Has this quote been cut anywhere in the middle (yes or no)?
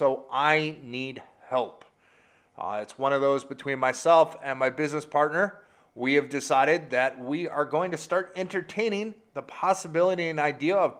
no